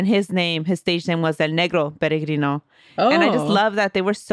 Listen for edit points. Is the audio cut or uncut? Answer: uncut